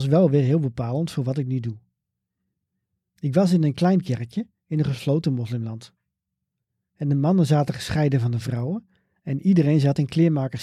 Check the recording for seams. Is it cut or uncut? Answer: uncut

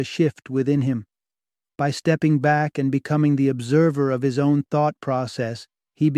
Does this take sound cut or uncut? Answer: uncut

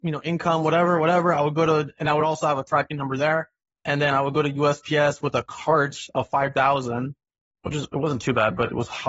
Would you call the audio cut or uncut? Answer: uncut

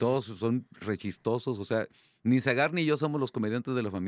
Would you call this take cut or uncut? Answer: uncut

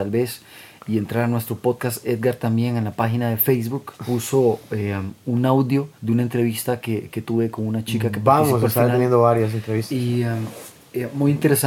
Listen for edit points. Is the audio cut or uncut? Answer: cut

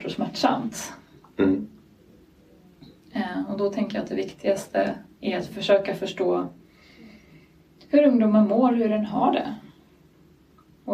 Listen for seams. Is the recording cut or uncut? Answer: uncut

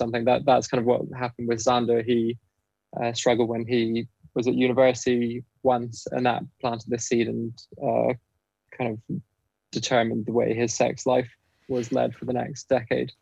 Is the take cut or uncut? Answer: uncut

